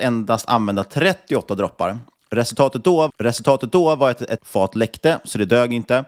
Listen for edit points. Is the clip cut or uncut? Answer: cut